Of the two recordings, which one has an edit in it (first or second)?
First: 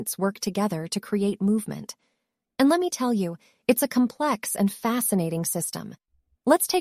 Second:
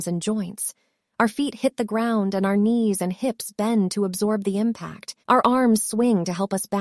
second